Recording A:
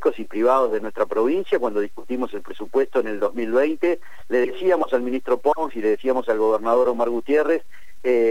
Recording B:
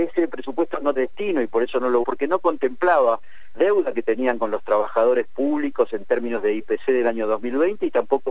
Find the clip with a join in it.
B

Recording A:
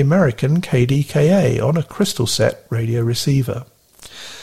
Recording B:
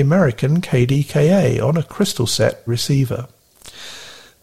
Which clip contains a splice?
B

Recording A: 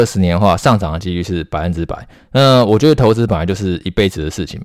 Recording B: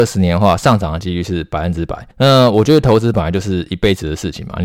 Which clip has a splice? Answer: B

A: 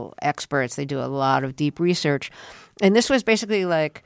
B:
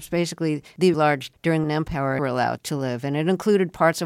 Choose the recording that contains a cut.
B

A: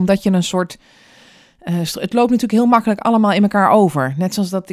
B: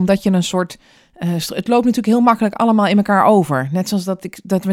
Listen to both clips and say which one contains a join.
B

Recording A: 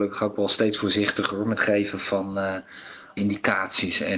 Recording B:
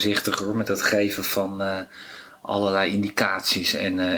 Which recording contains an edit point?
A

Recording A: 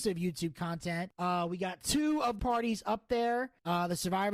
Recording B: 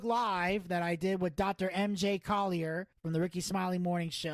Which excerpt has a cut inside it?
A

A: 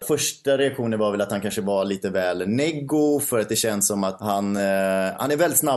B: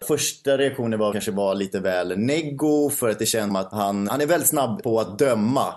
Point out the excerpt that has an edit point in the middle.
B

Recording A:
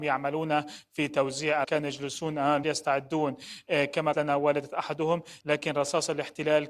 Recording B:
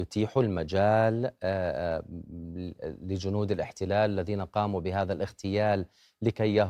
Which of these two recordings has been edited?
A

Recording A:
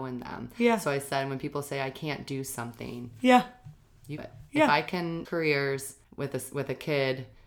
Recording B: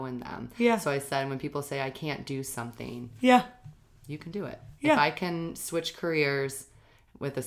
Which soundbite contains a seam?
A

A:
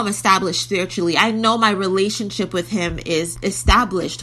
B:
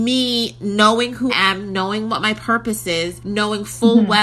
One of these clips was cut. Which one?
B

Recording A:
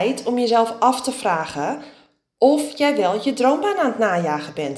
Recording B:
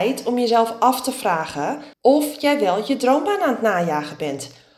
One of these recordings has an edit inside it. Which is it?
B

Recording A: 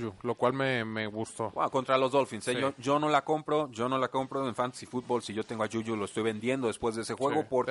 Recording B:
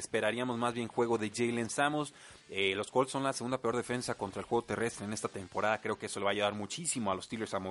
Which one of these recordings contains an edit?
A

